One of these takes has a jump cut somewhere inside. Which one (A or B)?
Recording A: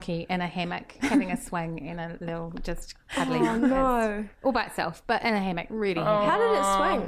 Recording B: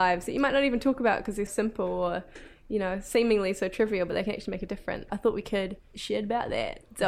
B